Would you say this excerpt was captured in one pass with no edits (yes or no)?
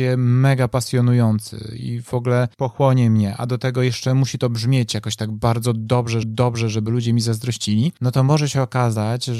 no